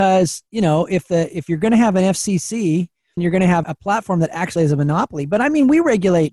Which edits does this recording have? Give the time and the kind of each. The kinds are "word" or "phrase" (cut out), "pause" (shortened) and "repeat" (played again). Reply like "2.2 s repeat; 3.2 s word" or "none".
3.2 s phrase; 3.6 s word; 4.6 s word